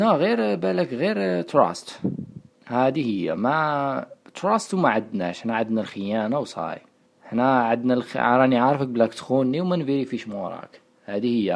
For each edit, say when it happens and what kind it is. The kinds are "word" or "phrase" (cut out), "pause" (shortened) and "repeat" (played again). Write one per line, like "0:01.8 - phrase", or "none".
0:02.5 - pause
0:07.1 - pause